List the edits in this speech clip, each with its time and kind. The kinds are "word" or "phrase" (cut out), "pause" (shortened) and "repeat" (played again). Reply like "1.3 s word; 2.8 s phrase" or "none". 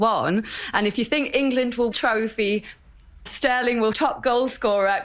1.9 s phrase; 3.3 s word; 3.9 s word